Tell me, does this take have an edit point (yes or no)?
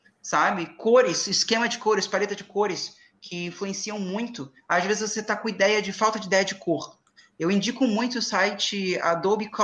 no